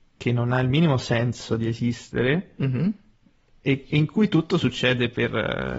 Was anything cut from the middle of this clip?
no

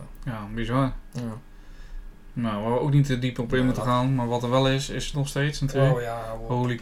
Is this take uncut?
no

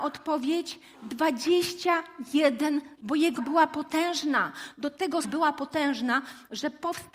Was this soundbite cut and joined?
yes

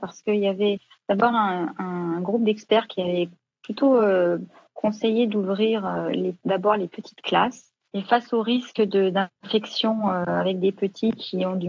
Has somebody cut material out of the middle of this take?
no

